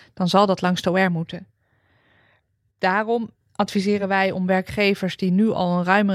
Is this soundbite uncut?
yes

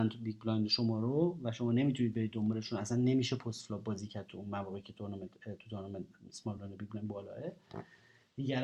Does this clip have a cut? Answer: no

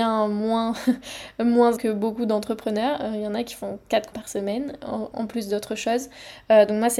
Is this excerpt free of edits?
no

